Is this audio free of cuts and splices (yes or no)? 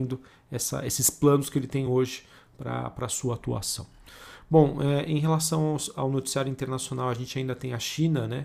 yes